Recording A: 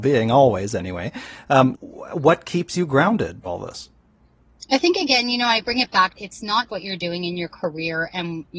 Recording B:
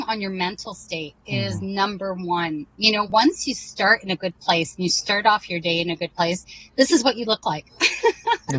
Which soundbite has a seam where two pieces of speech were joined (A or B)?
A